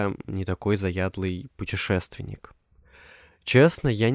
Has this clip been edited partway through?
no; 0 cuts

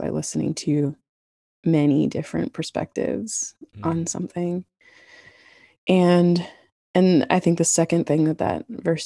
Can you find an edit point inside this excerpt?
no; 0 cuts

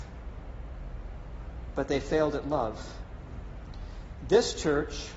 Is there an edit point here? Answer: no; 0 cuts

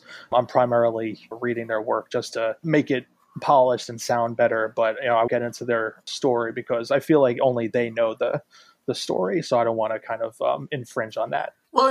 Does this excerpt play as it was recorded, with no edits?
no; 2 cuts; at 1.3 s, 5.3 s

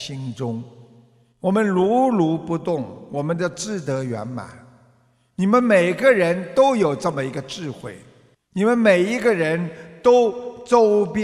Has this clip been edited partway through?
yes; 1 cut; at 8.3 s

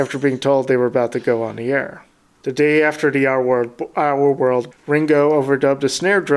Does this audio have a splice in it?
yes; 1 cut; at 4.7 s

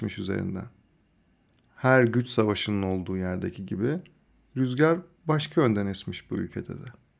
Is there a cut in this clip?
no; 0 cuts

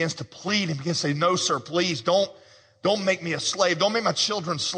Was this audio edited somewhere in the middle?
no; 0 cuts

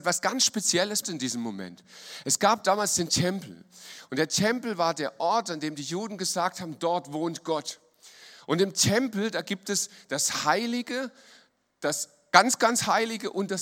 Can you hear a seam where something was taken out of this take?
yes; 1 cut; at 1.0 s

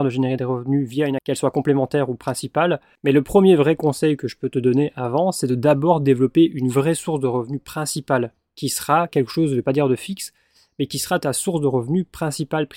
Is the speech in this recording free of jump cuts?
no; 1 cut; at 1.2 s

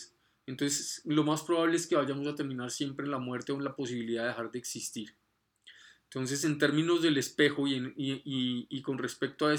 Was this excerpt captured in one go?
yes; 0 cuts

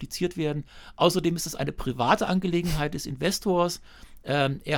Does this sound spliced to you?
no; 0 cuts

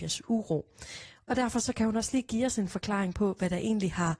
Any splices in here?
no; 0 cuts

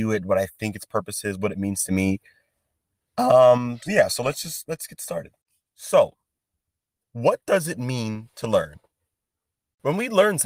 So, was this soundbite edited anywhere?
no; 0 cuts

